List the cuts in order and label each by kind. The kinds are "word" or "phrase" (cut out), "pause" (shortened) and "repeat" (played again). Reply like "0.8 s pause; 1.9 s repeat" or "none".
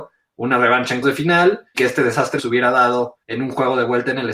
1.0 s word; 1.7 s word; 2.4 s word; 3.2 s pause